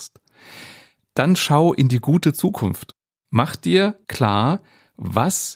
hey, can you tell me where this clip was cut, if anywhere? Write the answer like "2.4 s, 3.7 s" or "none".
none

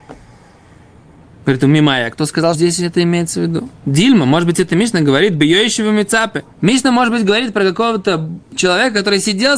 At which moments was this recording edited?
2.5 s, 3.8 s, 6.5 s

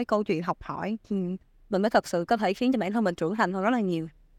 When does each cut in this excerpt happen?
none

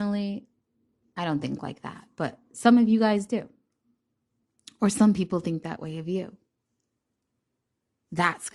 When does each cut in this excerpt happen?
none

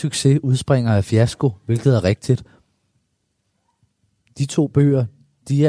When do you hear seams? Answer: none

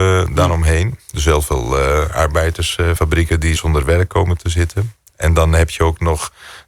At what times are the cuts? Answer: 3.0 s, 3.6 s

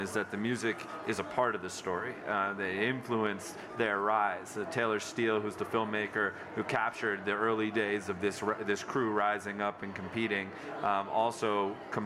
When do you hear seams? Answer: none

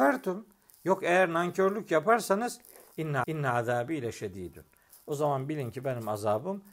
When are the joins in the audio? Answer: 3.2 s

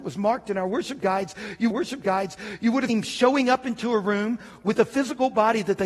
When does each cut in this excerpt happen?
1.7 s, 2.9 s

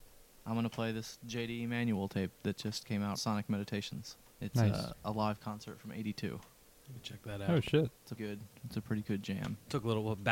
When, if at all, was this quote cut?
3.1 s, 4.3 s, 8.2 s

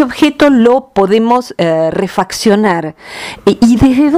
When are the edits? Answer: none

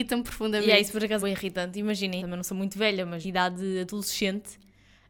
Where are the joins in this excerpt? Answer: 1.2 s, 2.2 s, 3.2 s

